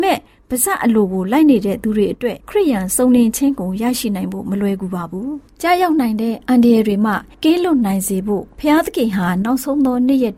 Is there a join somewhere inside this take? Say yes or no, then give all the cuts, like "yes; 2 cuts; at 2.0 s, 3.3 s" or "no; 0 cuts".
yes; 1 cut; at 2.4 s